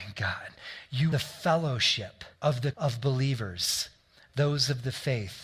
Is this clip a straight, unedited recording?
no; 3 cuts; at 1.1 s, 2.4 s, 2.7 s

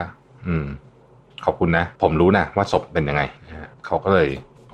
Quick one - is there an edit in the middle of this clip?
yes; 3 cuts; at 2.0 s, 3.4 s, 3.7 s

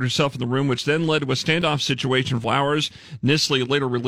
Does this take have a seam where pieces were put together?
yes; 1 cut; at 2.4 s

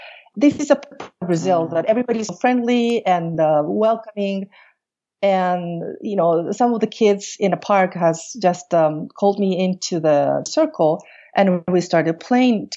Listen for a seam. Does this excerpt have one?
no; 0 cuts

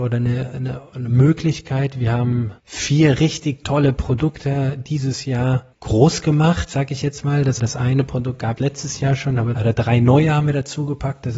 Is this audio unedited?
no; 5 cuts; at 2.6 s, 5.7 s, 7.6 s, 8.6 s, 9.5 s

